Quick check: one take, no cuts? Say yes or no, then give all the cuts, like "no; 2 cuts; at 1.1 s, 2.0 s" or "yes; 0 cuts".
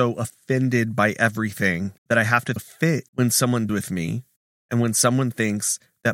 no; 5 cuts; at 2.0 s, 2.6 s, 3.1 s, 3.7 s, 4.4 s